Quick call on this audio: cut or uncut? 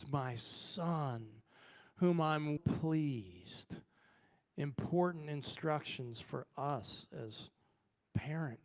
cut